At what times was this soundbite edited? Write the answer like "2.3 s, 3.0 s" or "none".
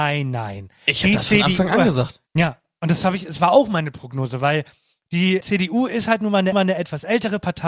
2.3 s, 5.4 s, 6.5 s